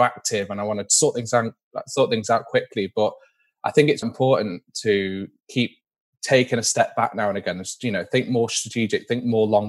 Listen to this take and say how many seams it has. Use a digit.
1